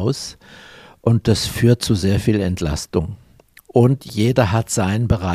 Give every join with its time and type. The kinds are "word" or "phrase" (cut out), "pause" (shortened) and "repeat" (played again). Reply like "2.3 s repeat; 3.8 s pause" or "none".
none